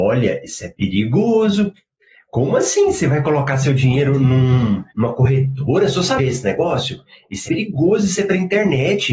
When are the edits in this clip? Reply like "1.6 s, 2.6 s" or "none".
4.9 s, 6.2 s, 7.5 s